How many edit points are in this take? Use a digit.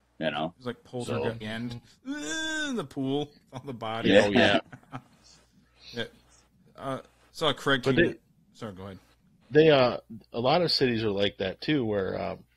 1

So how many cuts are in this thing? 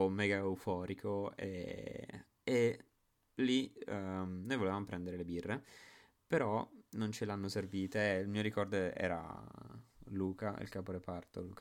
0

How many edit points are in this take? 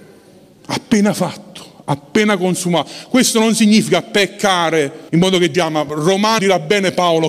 3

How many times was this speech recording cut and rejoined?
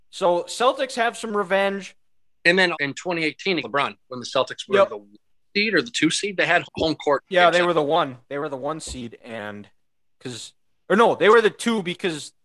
3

